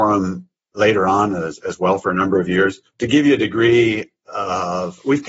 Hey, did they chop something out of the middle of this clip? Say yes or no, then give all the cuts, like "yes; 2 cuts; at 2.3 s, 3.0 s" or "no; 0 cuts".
yes; 1 cut; at 2.9 s